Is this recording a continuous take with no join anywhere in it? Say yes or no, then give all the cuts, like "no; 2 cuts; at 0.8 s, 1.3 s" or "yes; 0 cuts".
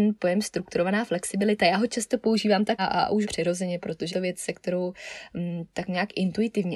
no; 3 cuts; at 2.8 s, 3.2 s, 4.1 s